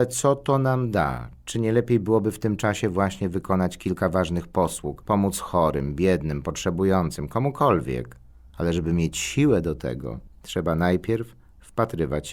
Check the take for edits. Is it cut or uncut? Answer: uncut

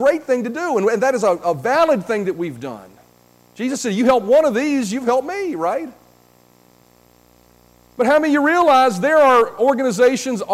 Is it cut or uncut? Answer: uncut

